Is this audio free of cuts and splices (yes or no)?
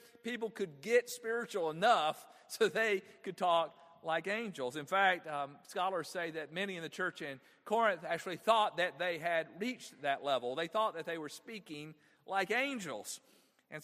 yes